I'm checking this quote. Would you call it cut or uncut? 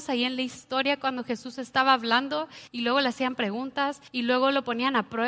cut